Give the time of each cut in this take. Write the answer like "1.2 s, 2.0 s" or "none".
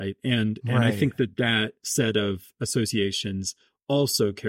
none